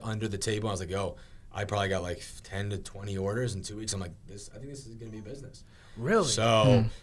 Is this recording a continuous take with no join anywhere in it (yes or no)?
yes